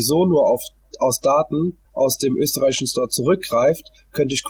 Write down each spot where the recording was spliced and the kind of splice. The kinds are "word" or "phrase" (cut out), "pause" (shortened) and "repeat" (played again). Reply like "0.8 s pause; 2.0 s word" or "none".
1.8 s pause